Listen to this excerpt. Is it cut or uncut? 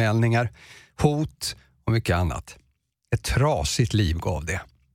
uncut